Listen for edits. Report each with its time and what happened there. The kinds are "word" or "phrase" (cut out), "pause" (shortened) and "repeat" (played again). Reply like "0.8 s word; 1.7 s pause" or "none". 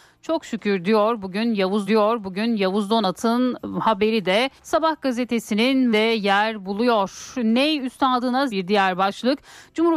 1.9 s repeat; 4.6 s pause; 5.9 s word; 8.5 s word